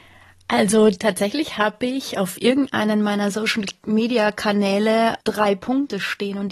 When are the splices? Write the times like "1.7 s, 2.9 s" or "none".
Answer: none